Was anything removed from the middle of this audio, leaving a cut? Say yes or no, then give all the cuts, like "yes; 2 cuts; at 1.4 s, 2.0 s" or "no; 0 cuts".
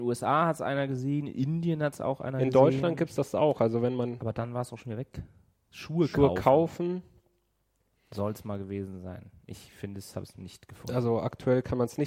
no; 0 cuts